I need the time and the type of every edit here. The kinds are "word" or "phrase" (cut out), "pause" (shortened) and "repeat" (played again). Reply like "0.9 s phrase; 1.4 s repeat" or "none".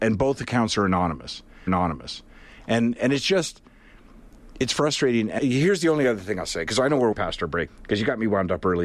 1.7 s repeat; 5.4 s word; 7.1 s phrase; 7.7 s word